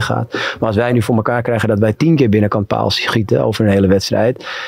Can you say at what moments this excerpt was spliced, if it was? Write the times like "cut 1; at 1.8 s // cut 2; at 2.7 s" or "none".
none